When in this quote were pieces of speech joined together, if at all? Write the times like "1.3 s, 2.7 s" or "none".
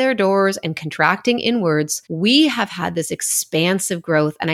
2.0 s